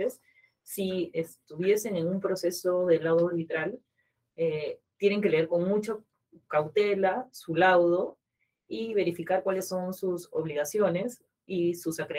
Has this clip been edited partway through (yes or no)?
no